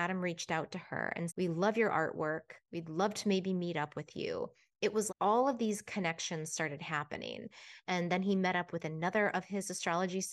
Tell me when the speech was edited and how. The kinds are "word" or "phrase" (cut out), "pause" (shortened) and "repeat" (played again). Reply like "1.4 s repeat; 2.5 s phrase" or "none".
1.3 s word; 5.1 s word